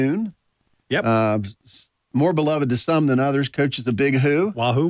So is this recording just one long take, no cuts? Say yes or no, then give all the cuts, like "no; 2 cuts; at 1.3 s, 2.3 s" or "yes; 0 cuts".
yes; 0 cuts